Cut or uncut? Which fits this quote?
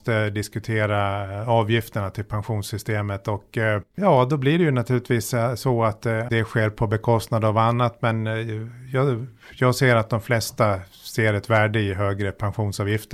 uncut